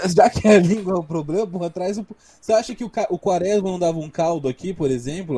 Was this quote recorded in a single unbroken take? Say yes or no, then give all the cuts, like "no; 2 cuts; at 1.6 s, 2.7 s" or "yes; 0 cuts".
yes; 0 cuts